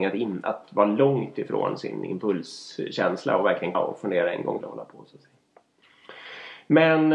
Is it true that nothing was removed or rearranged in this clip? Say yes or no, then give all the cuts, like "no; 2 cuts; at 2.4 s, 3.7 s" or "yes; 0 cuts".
no; 2 cuts; at 3.7 s, 4.6 s